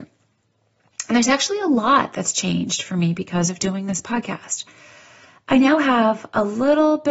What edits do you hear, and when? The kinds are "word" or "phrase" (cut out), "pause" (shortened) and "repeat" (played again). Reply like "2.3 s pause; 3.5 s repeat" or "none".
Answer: none